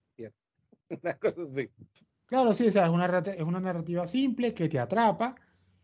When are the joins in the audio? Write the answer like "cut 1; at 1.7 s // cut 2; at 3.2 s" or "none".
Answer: none